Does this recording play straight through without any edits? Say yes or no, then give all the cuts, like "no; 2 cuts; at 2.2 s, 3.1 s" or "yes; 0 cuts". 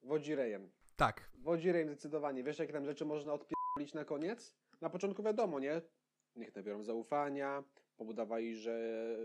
yes; 0 cuts